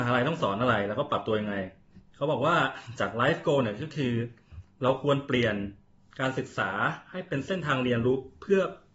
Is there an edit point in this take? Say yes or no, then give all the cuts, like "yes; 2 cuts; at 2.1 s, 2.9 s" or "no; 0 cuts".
no; 0 cuts